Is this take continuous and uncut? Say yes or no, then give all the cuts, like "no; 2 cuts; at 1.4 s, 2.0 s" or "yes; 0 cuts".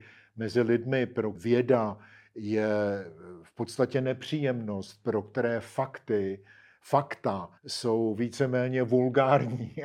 no; 2 cuts; at 1.3 s, 7.6 s